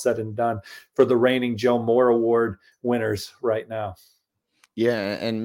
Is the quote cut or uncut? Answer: uncut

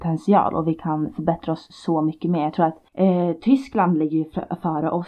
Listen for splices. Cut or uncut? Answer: cut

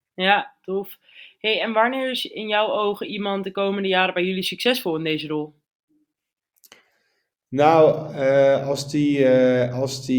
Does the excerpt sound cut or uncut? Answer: uncut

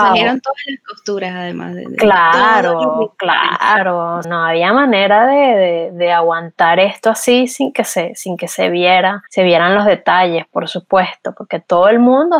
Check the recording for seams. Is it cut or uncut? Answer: cut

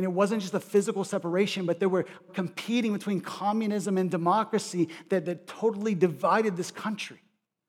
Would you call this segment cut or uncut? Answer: cut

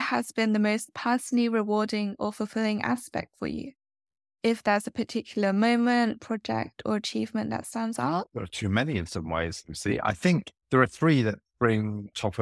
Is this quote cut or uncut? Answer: uncut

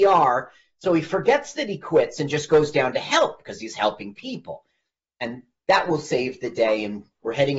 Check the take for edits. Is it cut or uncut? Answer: uncut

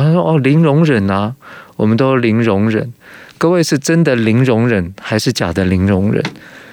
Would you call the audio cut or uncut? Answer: cut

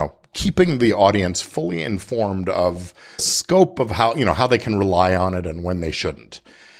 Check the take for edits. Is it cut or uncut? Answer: cut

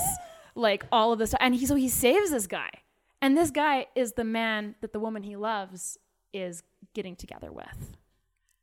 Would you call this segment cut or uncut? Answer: uncut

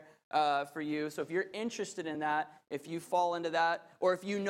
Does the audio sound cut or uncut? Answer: uncut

